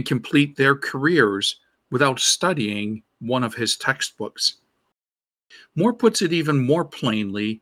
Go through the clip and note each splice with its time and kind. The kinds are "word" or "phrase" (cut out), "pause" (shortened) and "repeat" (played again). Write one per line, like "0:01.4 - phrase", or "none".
none